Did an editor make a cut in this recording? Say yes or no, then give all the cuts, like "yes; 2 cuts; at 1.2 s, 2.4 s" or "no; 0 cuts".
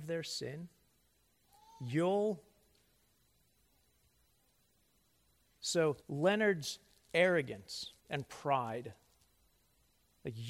yes; 2 cuts; at 6.0 s, 8.0 s